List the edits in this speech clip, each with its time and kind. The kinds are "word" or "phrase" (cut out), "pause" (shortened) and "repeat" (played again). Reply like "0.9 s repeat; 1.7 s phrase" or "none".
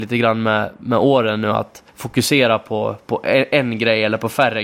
1.9 s pause; 3.0 s pause